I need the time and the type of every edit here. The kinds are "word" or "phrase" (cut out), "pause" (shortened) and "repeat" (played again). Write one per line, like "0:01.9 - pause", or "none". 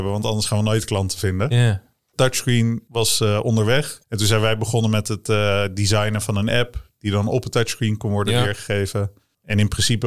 none